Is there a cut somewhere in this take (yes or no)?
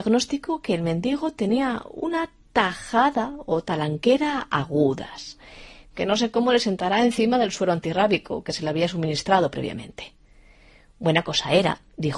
no